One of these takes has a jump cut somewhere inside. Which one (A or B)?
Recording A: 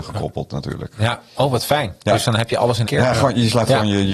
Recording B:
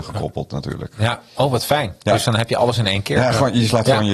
A